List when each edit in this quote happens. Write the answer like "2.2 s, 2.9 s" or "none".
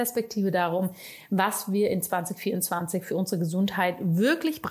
none